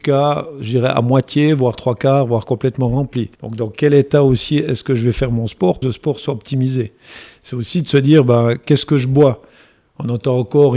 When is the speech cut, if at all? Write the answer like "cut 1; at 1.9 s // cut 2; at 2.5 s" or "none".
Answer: cut 1; at 3.3 s // cut 2; at 5.8 s